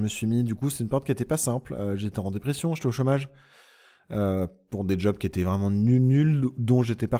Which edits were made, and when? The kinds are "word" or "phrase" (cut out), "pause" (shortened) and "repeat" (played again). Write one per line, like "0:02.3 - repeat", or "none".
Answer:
none